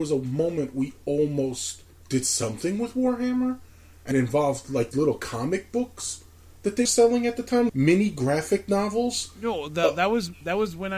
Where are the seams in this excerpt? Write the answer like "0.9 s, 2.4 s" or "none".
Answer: 4.1 s, 4.9 s, 6.9 s, 7.7 s